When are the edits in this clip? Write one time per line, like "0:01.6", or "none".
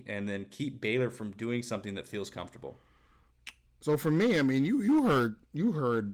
none